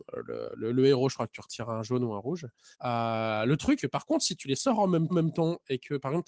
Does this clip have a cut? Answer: yes; 3 cuts; at 2.7 s, 3.8 s, 5.1 s

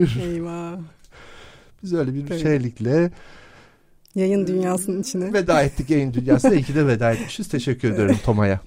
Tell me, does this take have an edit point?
no; 0 cuts

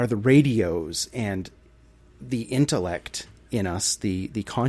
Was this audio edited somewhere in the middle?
no; 0 cuts

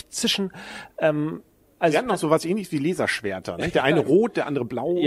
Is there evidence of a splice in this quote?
no; 0 cuts

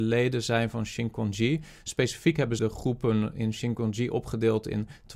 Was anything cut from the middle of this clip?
yes; 1 cut; at 2.6 s

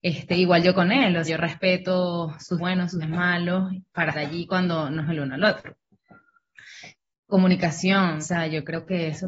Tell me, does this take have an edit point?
yes; 6 cuts; at 1.2 s, 2.6 s, 3.0 s, 4.1 s, 5.0 s, 8.2 s

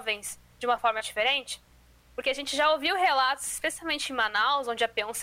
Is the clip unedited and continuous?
yes; 0 cuts

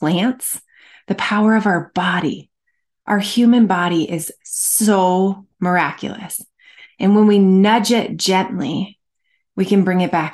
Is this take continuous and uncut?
yes; 0 cuts

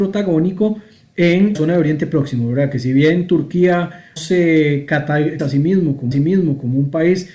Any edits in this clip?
yes; 4 cuts; at 1.5 s, 4.2 s, 5.4 s, 6.1 s

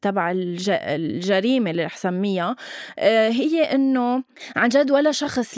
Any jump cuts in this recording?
no; 0 cuts

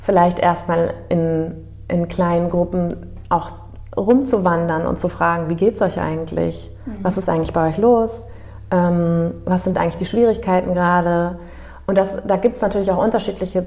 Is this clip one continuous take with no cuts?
yes; 0 cuts

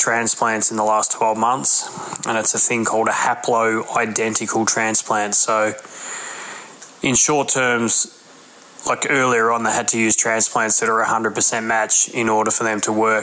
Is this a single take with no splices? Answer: yes; 0 cuts

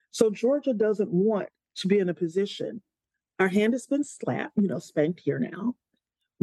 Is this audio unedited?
yes; 0 cuts

